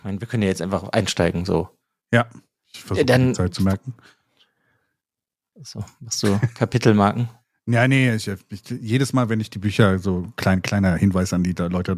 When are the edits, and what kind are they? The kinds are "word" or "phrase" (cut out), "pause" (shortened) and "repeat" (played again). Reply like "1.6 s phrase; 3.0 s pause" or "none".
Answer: none